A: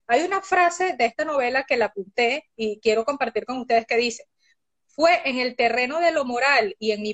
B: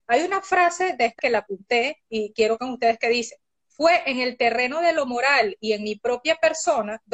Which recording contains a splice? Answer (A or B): B